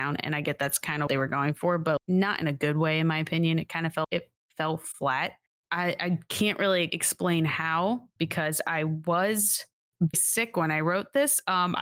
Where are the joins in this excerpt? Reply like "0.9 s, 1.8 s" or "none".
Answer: 1.1 s, 2.0 s, 4.0 s, 6.9 s, 8.2 s, 10.1 s